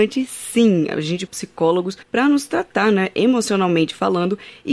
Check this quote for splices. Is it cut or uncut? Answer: cut